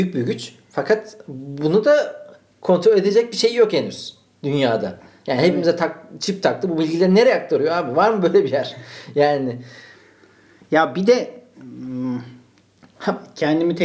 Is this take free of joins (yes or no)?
yes